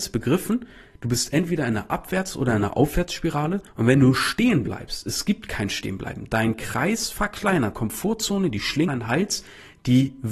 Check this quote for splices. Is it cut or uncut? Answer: cut